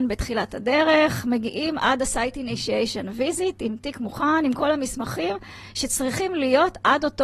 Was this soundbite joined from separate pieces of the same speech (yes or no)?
no